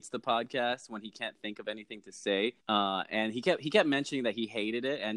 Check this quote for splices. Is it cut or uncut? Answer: cut